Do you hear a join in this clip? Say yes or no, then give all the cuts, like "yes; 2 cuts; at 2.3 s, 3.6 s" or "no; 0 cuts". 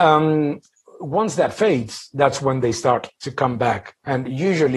no; 0 cuts